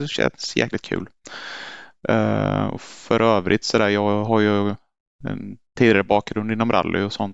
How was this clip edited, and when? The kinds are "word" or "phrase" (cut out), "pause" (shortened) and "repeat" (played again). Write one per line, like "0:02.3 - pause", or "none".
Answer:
none